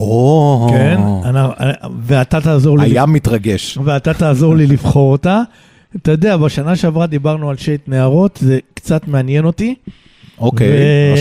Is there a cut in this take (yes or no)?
no